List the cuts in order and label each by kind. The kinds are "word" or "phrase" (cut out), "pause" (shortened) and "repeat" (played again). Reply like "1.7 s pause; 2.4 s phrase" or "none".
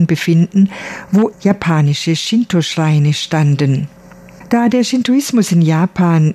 1.3 s word

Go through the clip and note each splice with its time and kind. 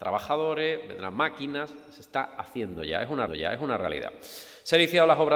3.3 s repeat

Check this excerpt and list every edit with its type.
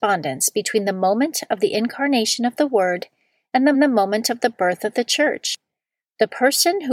3.7 s repeat

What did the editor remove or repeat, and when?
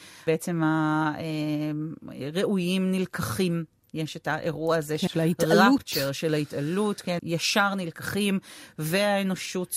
5.1 s word; 7.2 s phrase

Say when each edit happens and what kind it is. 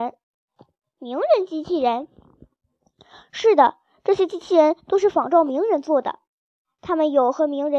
none

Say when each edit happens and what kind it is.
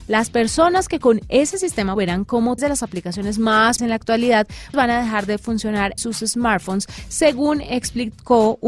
1.0 s word; 2.0 s word; 2.6 s word; 3.8 s word; 4.7 s word; 6.0 s word

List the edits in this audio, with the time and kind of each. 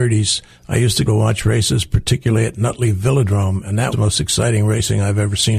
1.1 s word; 3.9 s word

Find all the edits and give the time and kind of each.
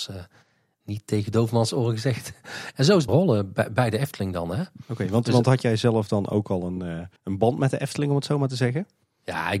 3.1 s phrase; 7.2 s pause

